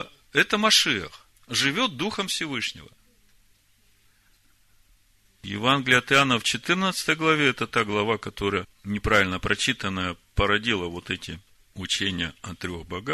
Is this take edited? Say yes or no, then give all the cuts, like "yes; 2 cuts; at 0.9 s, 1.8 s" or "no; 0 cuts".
yes; 1 cut; at 1.4 s